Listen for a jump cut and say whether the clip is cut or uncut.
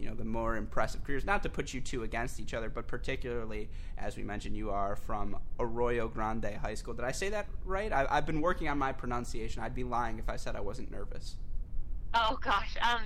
uncut